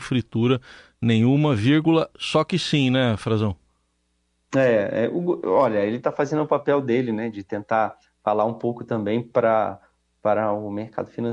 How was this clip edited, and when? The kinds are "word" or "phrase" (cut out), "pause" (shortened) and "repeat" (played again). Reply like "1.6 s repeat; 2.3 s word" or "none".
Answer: none